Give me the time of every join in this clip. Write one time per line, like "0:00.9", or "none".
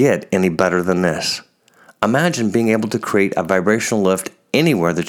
none